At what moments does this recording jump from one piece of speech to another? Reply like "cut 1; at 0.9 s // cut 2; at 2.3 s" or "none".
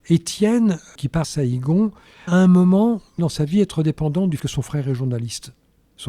cut 1; at 1.2 s // cut 2; at 2.3 s // cut 3; at 3.2 s // cut 4; at 4.4 s